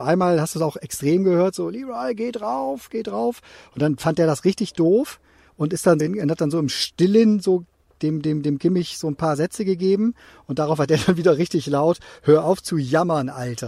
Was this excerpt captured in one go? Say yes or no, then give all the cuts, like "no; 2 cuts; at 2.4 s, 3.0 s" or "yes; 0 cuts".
no; 1 cut; at 6.0 s